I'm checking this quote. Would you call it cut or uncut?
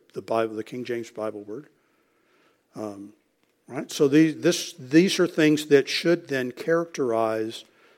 uncut